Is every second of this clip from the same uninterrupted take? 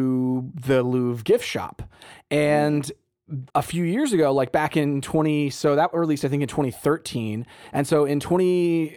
no; 1 cut; at 3.5 s

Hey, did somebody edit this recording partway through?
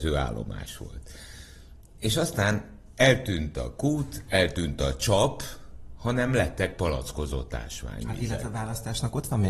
no; 0 cuts

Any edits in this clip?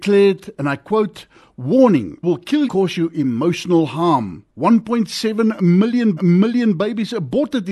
yes; 4 cuts; at 2.2 s, 2.7 s, 4.5 s, 6.2 s

